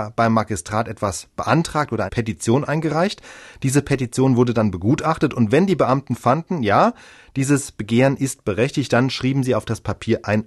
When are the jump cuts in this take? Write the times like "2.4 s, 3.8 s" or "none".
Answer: 2.1 s

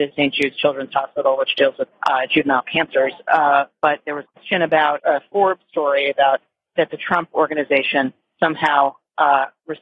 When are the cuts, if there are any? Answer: 1.9 s, 4.3 s, 5.0 s

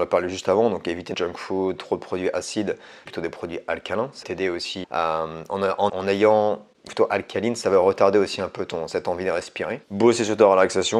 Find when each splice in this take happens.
1.1 s, 3.1 s, 4.2 s, 4.8 s, 5.9 s, 6.9 s, 9.8 s

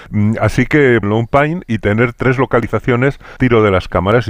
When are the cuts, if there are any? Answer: 1.0 s, 3.4 s

